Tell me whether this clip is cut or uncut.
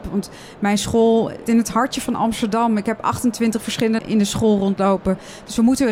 cut